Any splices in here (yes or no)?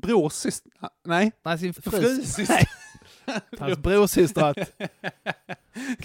yes